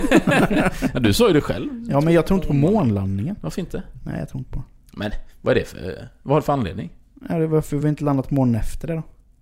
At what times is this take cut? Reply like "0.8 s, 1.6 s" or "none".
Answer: none